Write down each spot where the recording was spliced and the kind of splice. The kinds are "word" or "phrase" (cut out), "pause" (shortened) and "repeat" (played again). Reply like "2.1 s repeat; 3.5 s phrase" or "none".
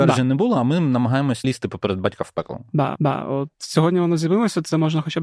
1.4 s word; 3.0 s repeat